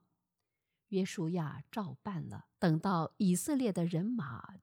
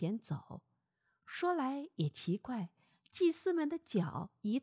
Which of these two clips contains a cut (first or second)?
first